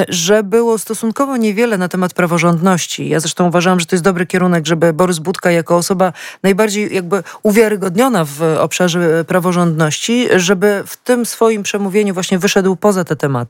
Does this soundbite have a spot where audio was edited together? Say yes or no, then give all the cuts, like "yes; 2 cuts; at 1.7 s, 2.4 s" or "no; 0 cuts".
no; 0 cuts